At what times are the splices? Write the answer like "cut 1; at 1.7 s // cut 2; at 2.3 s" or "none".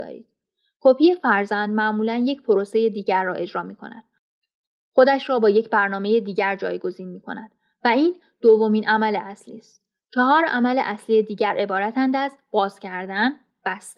none